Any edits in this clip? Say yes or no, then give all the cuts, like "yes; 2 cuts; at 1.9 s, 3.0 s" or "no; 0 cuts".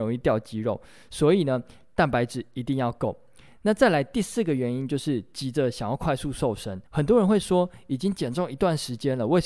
yes; 1 cut; at 6.9 s